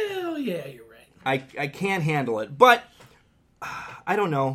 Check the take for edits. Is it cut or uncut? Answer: uncut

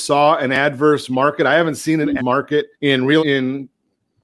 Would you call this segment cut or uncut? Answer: cut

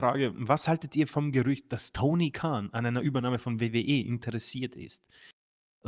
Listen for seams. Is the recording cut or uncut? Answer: uncut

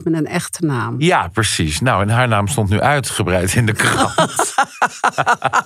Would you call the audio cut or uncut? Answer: uncut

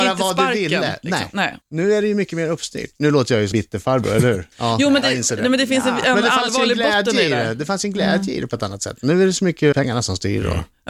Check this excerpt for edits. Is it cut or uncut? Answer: cut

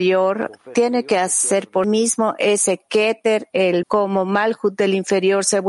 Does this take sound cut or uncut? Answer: cut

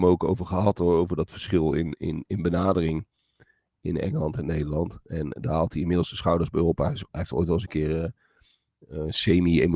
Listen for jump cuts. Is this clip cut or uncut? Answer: uncut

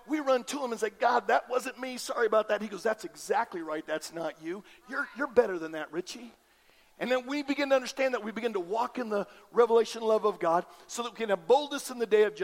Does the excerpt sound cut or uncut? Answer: uncut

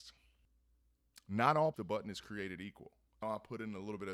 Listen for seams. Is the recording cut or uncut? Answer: cut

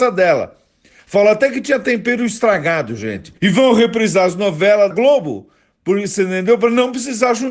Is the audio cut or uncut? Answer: cut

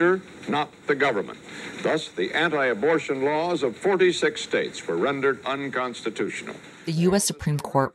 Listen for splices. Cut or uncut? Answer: cut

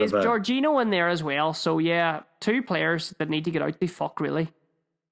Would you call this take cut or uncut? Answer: uncut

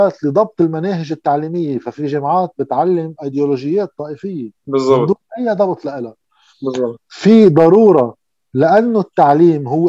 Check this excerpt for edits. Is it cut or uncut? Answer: cut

